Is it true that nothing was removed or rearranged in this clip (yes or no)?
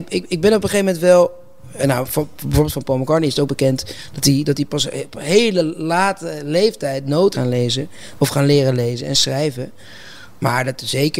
no